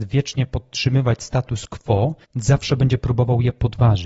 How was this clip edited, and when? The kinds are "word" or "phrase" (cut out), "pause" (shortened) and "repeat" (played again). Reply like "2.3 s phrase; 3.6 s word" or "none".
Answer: 2.2 s pause